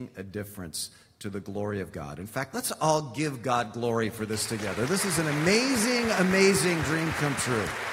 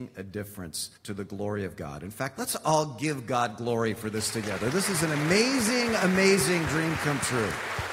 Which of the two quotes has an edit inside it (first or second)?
second